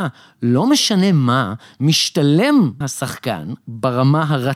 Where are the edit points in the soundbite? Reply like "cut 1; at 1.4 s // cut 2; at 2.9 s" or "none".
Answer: cut 1; at 2.8 s // cut 2; at 3.6 s